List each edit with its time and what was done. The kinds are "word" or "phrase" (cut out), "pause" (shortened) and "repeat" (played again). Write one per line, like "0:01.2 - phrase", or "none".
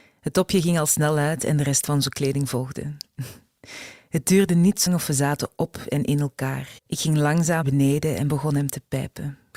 0:04.9 - word
0:06.8 - pause
0:07.6 - word

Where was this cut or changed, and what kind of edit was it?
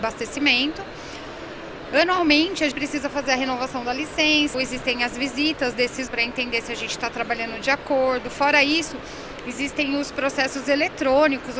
0:02.7 - word
0:04.5 - word
0:06.1 - word

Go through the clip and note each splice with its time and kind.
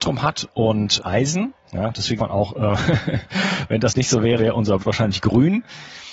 0:01.0 - word
0:02.2 - word
0:04.4 - word
0:04.8 - word

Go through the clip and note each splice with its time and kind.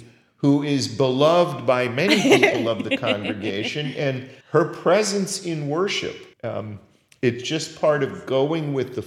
0:04.4 - pause
0:06.3 - pause

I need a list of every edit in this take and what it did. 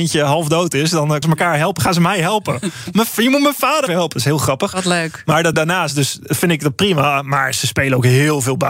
0:01.2 - word
0:03.9 - word
0:05.5 - phrase

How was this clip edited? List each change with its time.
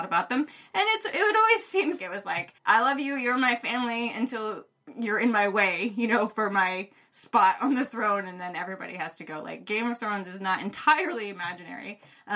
0:02.0 - word
0:02.6 - pause

